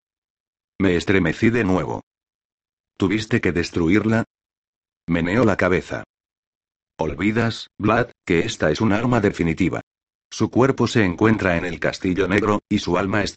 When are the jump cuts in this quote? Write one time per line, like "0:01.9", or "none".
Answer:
none